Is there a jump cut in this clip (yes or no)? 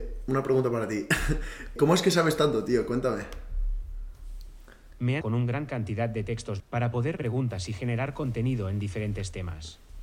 yes